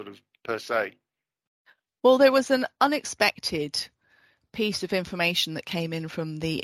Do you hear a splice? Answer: no; 0 cuts

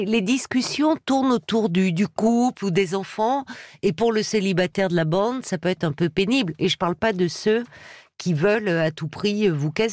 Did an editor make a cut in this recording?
no; 0 cuts

